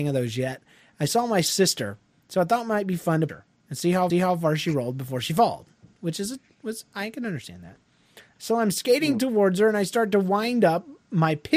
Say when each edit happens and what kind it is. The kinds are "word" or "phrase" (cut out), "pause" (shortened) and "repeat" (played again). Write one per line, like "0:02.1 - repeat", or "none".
0:03.3 - word
0:04.1 - repeat

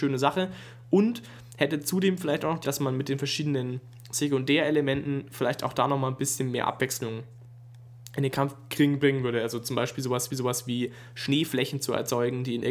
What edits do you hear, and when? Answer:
0:02.6 - word
0:10.3 - repeat

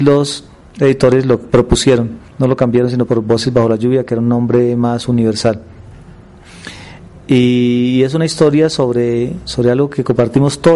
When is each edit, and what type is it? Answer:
0:01.5 - word
0:02.3 - pause
0:03.1 - phrase

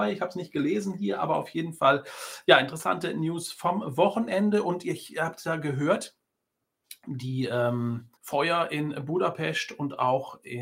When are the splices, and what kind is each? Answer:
0:08.2 - pause

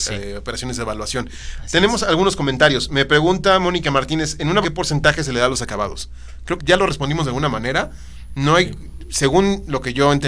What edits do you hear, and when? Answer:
0:04.6 - word
0:06.6 - word

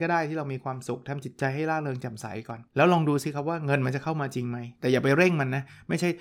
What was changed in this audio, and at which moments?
0:02.7 - pause

